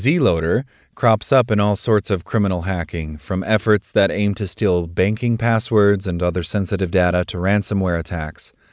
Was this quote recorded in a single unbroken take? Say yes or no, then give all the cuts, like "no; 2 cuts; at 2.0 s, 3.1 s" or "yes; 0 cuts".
yes; 0 cuts